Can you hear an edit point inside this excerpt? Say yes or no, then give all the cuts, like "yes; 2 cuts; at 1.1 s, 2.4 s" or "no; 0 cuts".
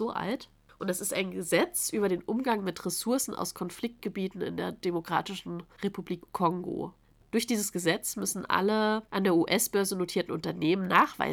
no; 0 cuts